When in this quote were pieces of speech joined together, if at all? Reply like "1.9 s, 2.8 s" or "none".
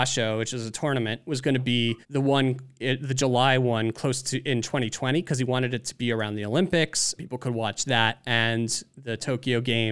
2.0 s, 7.2 s